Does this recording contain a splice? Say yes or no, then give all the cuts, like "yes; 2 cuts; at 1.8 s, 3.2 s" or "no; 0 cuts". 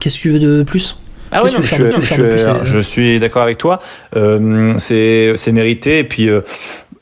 yes; 1 cut; at 1.9 s